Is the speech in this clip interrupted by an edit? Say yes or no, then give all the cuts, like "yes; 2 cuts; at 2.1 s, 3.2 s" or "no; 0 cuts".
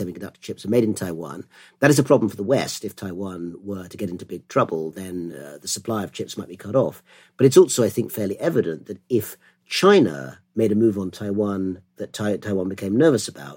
no; 0 cuts